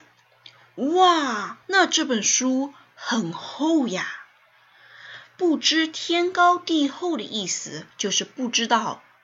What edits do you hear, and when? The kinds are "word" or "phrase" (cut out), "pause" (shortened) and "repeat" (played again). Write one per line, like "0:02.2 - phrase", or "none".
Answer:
0:01.6 - pause
0:07.9 - pause